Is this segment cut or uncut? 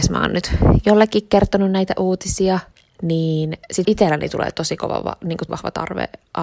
cut